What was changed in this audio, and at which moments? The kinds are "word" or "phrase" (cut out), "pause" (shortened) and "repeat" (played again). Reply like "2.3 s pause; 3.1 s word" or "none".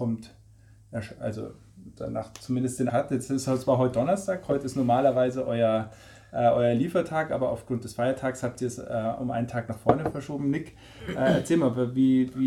2.9 s word